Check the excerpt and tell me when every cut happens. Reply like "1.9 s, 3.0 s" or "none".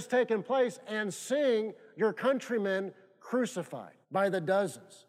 4.0 s